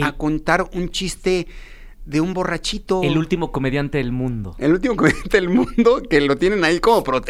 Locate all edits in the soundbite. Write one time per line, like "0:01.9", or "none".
none

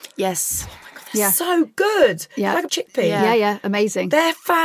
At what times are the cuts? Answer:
0:02.7

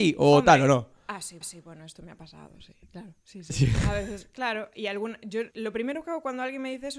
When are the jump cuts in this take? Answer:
0:01.4
0:03.2
0:05.5

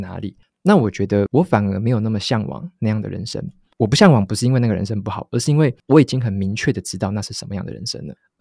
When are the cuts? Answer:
none

